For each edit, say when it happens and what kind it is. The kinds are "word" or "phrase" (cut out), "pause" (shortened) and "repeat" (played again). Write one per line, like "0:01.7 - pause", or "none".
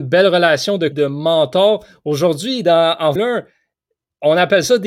0:00.9 - word
0:03.2 - word